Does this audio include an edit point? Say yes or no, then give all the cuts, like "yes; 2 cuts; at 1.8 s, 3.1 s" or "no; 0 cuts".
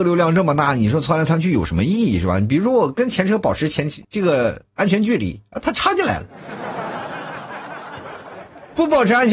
yes; 1 cut; at 4.0 s